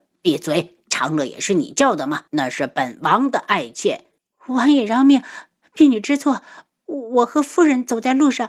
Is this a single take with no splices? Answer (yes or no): no